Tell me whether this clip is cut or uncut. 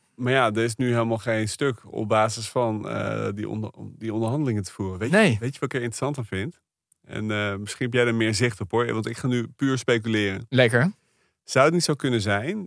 uncut